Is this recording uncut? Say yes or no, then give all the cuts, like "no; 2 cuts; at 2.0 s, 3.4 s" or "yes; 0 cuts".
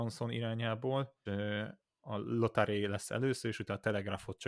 no; 1 cut; at 1.3 s